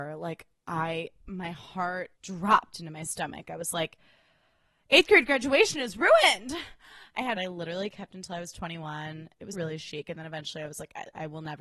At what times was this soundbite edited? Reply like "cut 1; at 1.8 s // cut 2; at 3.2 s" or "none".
cut 1; at 2.1 s // cut 2; at 7.4 s // cut 3; at 9.5 s